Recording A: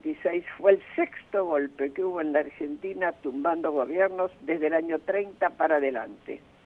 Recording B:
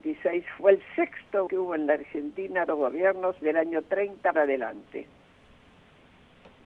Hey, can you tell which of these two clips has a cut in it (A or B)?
B